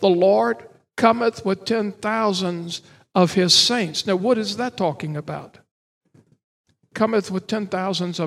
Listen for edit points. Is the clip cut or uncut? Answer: uncut